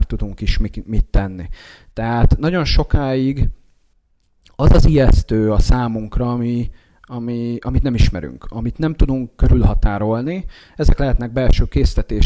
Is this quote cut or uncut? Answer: uncut